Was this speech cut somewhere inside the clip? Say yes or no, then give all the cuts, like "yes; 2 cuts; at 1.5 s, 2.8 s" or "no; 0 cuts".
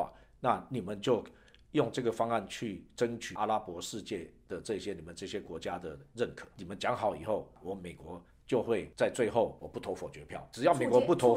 no; 0 cuts